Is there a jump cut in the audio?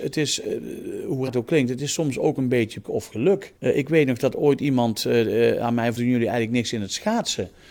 yes; 4 cuts; at 1.3 s, 2.8 s, 3.6 s, 6.0 s

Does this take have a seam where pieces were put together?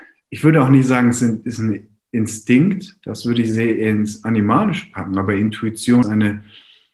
yes; 1 cut; at 6.0 s

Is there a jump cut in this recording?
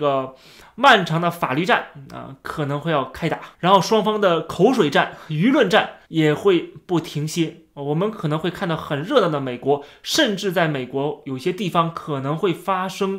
yes; 2 cuts; at 3.5 s, 6.0 s

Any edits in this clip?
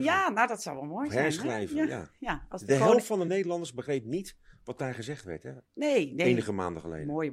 no; 0 cuts

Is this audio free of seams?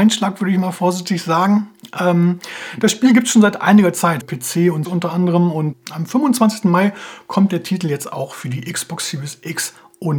no; 3 cuts; at 4.2 s, 4.8 s, 5.7 s

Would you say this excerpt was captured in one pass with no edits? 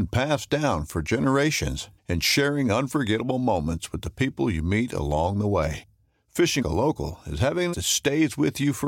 no; 3 cuts; at 2.0 s, 6.6 s, 7.7 s

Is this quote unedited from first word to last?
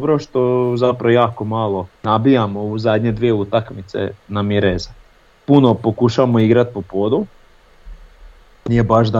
no; 2 cuts; at 1.9 s, 5.1 s

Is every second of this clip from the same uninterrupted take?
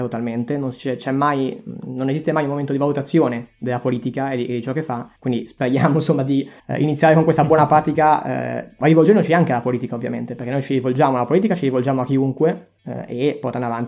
no; 3 cuts; at 5.2 s, 6.6 s, 12.8 s

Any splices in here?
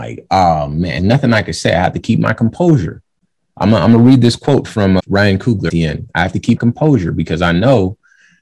yes; 4 cuts; at 1.0 s, 5.0 s, 5.7 s, 6.6 s

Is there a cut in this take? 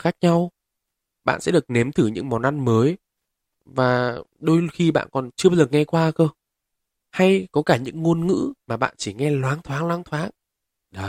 yes; 1 cut; at 8.6 s

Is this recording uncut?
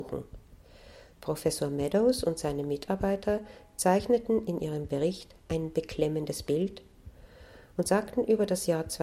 yes; 0 cuts

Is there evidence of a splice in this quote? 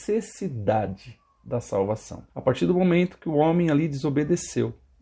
yes; 1 cut; at 2.3 s

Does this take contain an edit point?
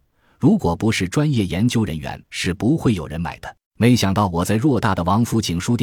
yes; 2 cuts; at 2.2 s, 3.7 s

